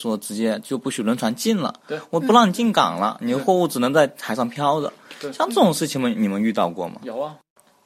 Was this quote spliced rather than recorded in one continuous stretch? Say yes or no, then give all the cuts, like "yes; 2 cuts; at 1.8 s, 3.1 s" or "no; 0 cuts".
no; 0 cuts